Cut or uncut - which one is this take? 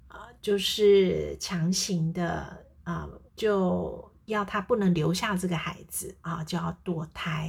cut